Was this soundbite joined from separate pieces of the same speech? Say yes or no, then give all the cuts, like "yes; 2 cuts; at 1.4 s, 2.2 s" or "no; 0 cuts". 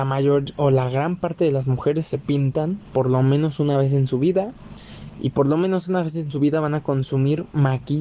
no; 0 cuts